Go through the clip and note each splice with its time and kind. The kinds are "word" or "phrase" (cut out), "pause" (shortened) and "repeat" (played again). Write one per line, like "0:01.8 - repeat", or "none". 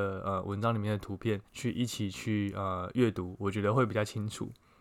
0:01.5 - pause